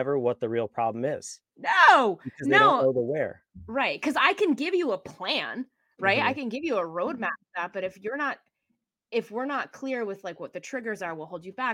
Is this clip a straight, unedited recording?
yes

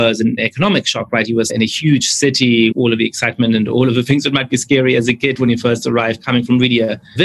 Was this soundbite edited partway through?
yes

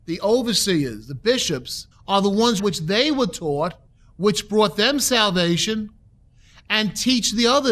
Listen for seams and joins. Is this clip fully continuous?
no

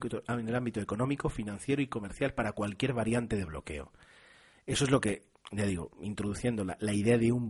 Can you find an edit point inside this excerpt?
no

